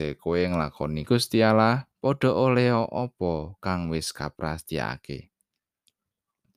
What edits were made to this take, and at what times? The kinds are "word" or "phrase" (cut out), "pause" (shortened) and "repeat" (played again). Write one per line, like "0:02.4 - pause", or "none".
0:01.1 - word
0:01.9 - pause